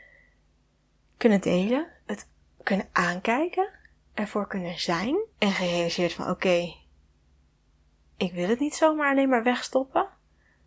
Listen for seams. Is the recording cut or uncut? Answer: cut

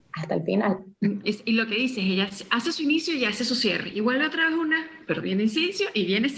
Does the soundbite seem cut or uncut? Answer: uncut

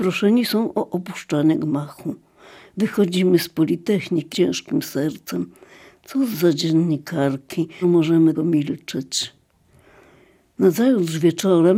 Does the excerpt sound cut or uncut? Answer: cut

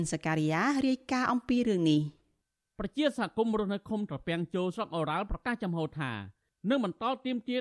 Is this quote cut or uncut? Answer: uncut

